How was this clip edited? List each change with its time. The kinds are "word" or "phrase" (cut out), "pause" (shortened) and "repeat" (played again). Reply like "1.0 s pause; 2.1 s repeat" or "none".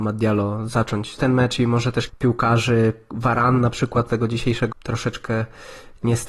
1.2 s word; 2.1 s word; 4.1 s word; 4.7 s word